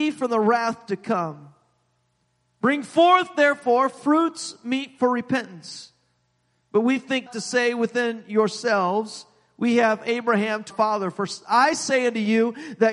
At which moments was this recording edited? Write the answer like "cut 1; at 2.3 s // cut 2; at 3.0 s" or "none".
cut 1; at 7.3 s // cut 2; at 10.7 s